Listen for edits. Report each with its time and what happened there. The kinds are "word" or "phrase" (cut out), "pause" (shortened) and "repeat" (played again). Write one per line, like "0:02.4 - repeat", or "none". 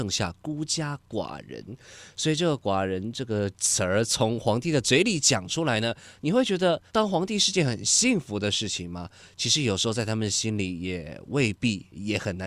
0:06.9 - pause